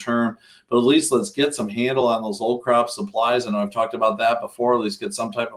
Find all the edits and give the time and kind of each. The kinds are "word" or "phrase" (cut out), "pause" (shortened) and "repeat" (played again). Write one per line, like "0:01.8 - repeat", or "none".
none